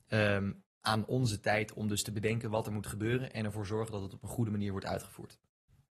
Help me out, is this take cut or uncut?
uncut